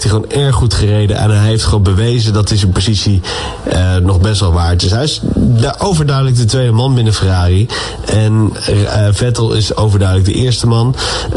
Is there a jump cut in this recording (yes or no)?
no